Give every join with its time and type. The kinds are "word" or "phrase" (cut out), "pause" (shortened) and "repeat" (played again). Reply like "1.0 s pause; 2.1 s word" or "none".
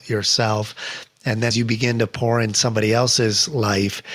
1.5 s word